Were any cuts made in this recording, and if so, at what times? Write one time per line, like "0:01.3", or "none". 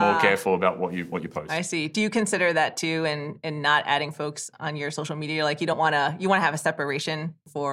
none